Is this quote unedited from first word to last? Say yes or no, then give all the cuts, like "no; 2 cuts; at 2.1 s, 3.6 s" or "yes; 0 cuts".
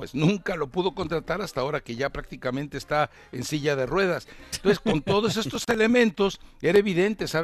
yes; 0 cuts